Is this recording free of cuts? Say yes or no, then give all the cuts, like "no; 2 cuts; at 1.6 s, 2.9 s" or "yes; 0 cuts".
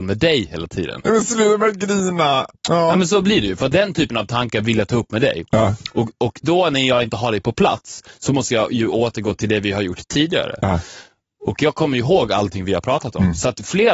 no; 1 cut; at 2.6 s